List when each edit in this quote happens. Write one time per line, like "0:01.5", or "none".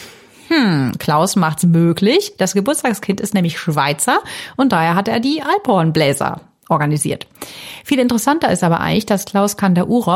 none